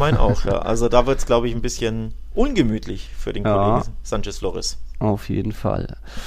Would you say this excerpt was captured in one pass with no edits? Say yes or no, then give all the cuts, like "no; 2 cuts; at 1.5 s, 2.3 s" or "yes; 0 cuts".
yes; 0 cuts